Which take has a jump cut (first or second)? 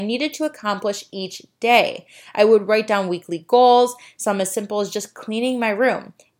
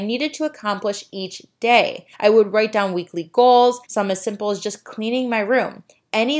second